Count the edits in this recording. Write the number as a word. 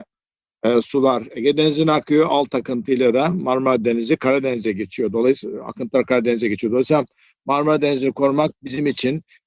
zero